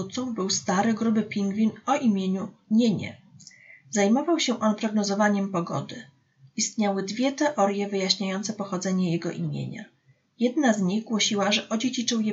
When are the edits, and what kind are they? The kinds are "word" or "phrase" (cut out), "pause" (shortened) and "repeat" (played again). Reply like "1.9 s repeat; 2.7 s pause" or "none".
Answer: none